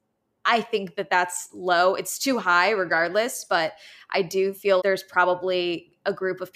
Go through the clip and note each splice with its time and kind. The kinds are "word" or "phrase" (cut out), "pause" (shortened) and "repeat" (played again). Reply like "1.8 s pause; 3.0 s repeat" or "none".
4.8 s word